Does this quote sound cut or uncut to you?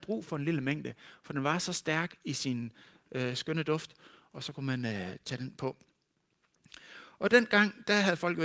uncut